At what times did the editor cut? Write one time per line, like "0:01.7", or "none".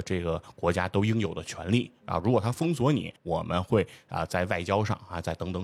0:03.2